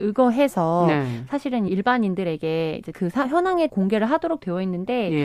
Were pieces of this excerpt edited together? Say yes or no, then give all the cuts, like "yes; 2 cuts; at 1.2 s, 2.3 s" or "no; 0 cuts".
yes; 3 cuts; at 1.7 s, 2.9 s, 3.7 s